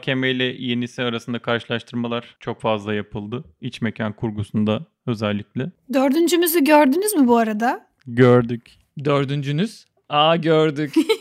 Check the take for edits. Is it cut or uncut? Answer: uncut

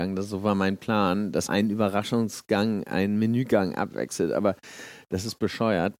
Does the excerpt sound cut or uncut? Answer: cut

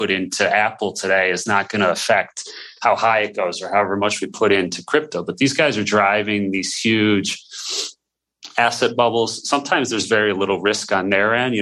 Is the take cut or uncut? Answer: uncut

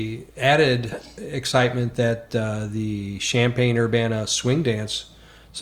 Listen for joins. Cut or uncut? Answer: uncut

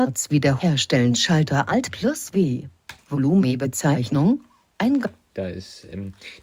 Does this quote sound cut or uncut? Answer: uncut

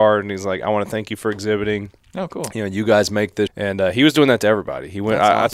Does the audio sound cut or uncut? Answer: cut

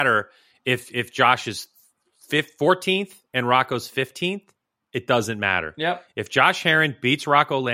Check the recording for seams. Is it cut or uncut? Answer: uncut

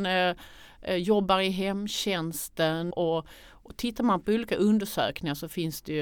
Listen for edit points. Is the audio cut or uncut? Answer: cut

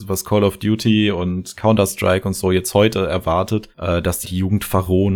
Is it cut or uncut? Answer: cut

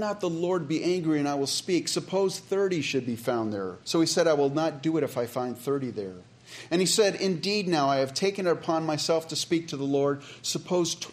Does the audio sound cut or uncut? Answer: cut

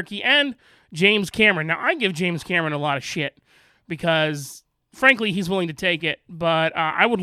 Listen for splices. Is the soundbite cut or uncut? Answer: uncut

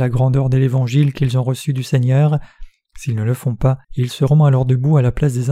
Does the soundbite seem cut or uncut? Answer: cut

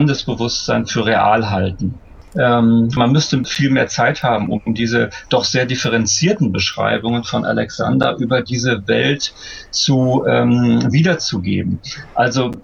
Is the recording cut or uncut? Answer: uncut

